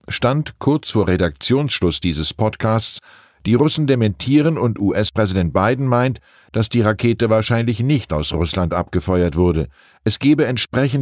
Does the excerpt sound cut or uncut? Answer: uncut